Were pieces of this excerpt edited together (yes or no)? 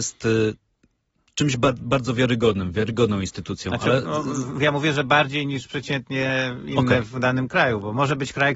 no